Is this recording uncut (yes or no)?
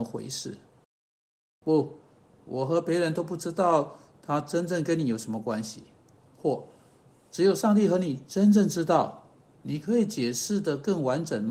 yes